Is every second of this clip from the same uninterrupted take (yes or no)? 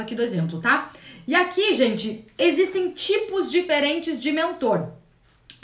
yes